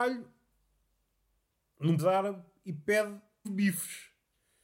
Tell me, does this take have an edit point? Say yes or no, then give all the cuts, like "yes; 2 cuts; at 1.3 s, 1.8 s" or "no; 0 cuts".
yes; 2 cuts; at 2.0 s, 3.4 s